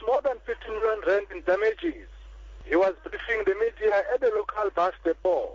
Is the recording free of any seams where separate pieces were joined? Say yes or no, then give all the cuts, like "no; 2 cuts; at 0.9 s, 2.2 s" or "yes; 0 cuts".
yes; 0 cuts